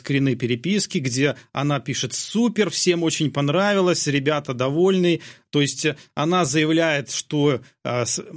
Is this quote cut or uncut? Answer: uncut